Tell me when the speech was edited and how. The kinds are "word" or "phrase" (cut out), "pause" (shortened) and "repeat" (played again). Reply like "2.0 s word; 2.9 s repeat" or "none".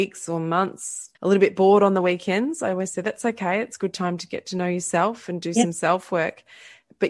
1.1 s pause